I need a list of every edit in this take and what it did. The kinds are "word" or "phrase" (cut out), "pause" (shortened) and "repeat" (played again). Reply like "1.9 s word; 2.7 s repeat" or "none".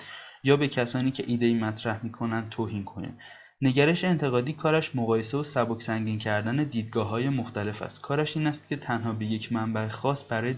none